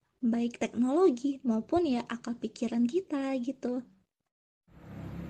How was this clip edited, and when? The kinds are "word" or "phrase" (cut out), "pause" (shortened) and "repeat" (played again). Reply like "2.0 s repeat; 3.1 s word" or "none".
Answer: none

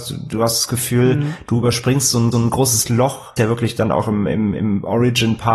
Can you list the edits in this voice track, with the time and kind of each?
2.3 s repeat; 3.4 s phrase

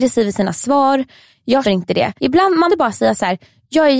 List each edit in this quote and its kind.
1.6 s word; 2.2 s pause; 2.7 s word

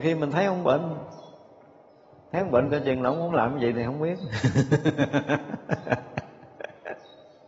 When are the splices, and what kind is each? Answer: none

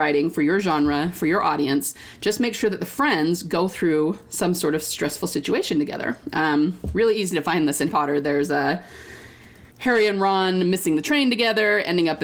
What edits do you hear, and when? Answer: 7.9 s word; 9.7 s pause

